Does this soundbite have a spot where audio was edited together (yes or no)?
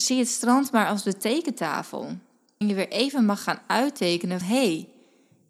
yes